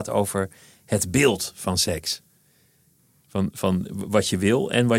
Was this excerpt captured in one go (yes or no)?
yes